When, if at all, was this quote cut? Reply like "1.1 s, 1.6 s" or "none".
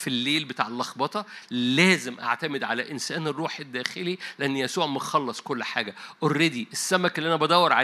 none